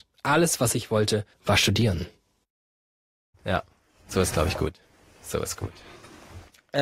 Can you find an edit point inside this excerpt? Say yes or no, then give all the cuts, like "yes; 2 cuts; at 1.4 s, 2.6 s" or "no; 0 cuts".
yes; 1 cut; at 1.3 s